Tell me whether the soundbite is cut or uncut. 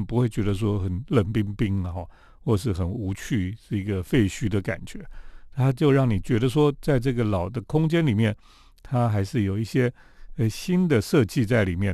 uncut